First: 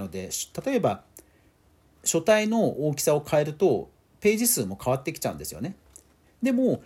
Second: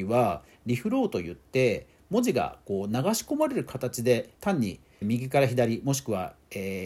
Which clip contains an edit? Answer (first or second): second